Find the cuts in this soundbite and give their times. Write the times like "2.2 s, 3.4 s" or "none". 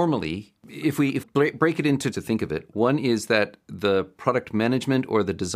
1.2 s, 2.1 s

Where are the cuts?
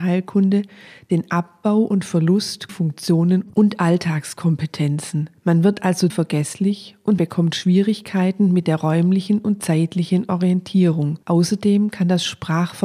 2.7 s, 5.4 s, 6.1 s, 7.2 s, 11.2 s

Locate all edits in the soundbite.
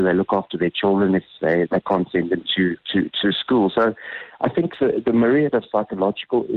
2.8 s

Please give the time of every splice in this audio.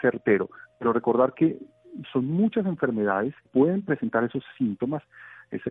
3.5 s

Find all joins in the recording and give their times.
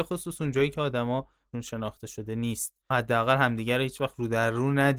1.5 s, 2.9 s

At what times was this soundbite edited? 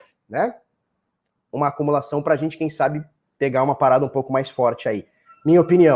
none

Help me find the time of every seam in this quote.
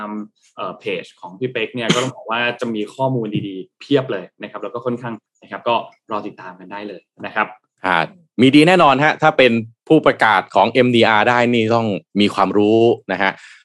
5.3 s

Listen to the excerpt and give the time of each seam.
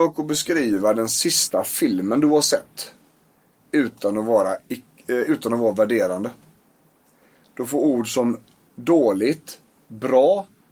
none

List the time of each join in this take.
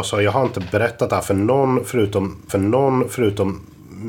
2.5 s

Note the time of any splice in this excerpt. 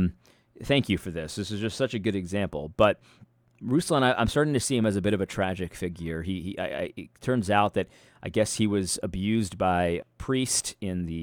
10.0 s

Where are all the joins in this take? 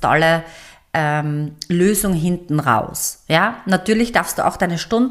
none

